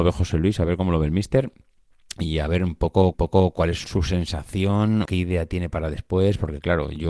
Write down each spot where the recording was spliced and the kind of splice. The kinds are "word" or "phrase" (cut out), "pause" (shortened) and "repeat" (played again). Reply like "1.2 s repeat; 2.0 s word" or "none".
3.1 s repeat; 3.8 s word; 5.0 s word